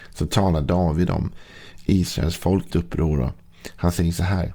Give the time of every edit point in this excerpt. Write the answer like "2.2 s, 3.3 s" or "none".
2.7 s